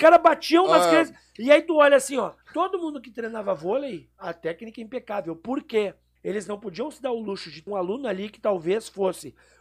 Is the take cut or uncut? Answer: cut